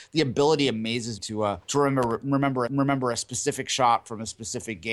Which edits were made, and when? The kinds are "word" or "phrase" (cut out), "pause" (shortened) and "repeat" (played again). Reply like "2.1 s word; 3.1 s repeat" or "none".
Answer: 1.2 s word; 1.6 s pause; 2.7 s repeat